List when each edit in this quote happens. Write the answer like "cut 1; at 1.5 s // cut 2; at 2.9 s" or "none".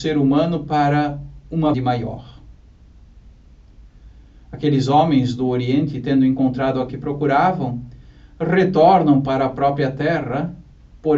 cut 1; at 1.7 s // cut 2; at 6.9 s